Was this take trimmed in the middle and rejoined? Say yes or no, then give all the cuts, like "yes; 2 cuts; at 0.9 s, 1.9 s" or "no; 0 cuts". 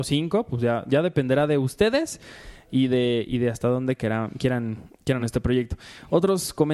yes; 1 cut; at 5.2 s